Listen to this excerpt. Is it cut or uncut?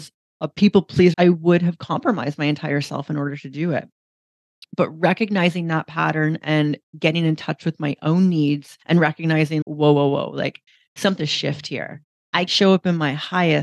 cut